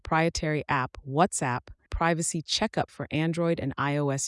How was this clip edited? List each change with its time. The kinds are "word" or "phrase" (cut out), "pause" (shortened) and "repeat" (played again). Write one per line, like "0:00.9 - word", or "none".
0:01.9 - phrase
0:02.9 - word